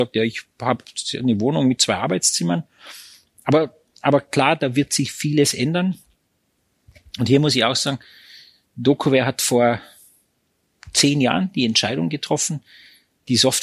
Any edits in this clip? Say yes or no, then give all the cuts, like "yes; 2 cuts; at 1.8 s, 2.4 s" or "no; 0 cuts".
no; 0 cuts